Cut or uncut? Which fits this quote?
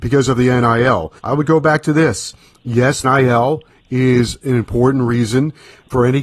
cut